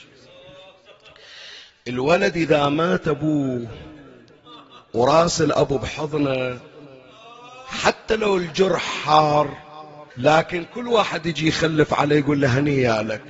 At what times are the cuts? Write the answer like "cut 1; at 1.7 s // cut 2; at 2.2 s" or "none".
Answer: cut 1; at 1.6 s // cut 2; at 4.8 s // cut 3; at 10.1 s